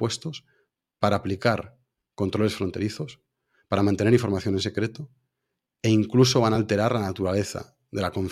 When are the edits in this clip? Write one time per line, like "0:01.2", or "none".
none